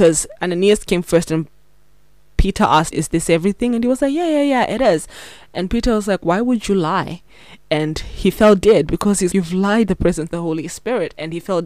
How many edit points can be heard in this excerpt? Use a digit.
4